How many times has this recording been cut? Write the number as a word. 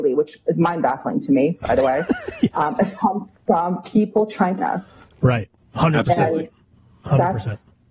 four